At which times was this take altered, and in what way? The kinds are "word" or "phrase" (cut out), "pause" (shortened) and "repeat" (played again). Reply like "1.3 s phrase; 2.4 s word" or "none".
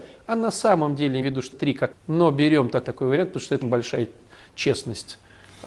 1.2 s word; 1.5 s word; 1.9 s word; 2.8 s word; 3.6 s word